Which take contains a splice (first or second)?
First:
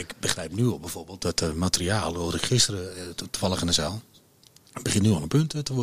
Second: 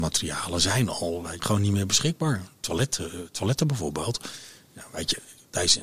second